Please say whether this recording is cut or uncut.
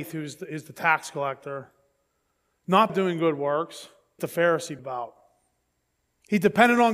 cut